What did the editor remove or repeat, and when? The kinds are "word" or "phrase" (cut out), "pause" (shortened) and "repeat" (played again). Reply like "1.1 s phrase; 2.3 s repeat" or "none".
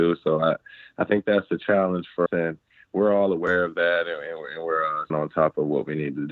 2.3 s word; 5.1 s word